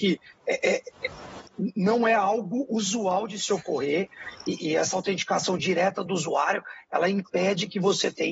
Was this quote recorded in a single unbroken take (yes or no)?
yes